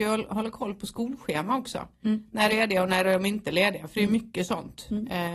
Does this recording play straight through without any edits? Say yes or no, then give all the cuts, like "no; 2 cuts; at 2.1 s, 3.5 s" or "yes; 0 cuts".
no; 1 cut; at 2.5 s